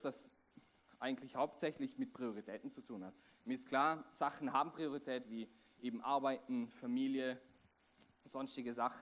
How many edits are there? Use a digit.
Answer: 0